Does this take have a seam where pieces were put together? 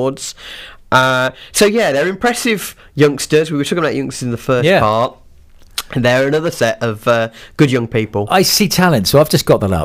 no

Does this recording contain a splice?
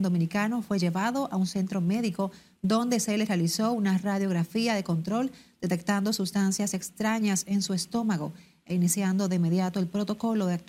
no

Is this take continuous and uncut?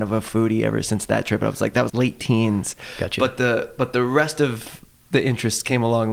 no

